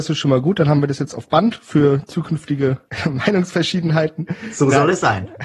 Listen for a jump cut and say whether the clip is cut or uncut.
uncut